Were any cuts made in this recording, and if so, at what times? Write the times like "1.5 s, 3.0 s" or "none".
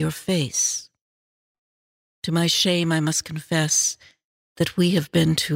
none